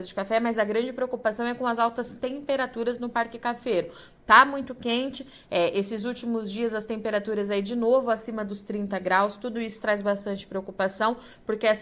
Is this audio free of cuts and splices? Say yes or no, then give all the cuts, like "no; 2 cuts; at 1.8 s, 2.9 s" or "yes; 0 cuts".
yes; 0 cuts